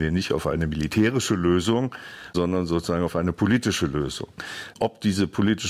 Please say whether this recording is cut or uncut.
uncut